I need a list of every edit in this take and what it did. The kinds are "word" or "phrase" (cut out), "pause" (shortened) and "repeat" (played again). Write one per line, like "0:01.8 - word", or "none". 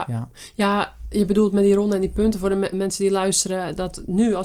0:02.7 - word